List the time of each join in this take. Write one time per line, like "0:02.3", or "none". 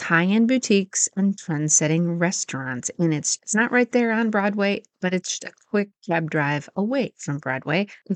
0:03.4
0:05.4
0:06.0